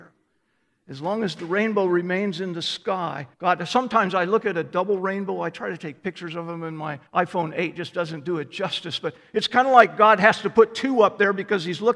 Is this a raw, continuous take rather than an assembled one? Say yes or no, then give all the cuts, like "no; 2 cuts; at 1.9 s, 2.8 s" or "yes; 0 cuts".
no; 2 cuts; at 3.3 s, 7.1 s